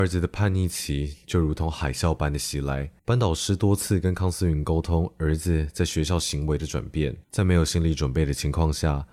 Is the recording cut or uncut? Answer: cut